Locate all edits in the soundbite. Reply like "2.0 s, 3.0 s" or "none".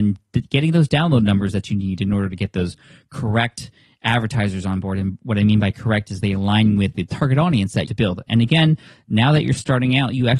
7.9 s